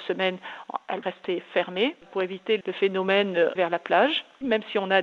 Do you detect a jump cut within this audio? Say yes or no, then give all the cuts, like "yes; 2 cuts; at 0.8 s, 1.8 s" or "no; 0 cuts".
yes; 3 cuts; at 1.0 s, 2.6 s, 3.6 s